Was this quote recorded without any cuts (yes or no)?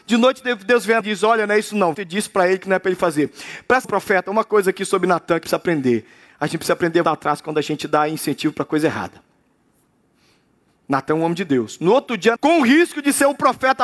no